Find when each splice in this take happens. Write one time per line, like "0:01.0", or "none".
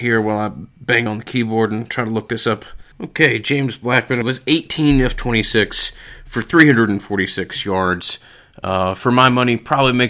0:01.1
0:02.9
0:04.2